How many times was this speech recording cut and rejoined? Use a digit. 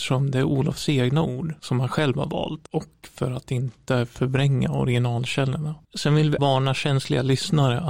3